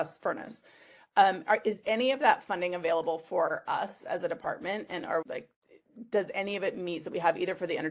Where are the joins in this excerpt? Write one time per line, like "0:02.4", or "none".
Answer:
0:05.2
0:07.0